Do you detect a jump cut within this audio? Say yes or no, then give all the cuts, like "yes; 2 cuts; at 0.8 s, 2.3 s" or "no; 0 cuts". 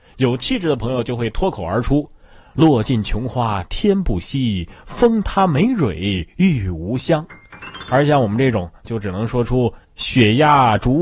yes; 2 cuts; at 8.8 s, 9.8 s